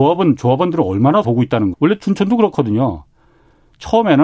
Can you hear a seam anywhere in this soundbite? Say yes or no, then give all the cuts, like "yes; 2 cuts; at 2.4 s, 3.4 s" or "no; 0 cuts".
yes; 2 cuts; at 1.2 s, 1.7 s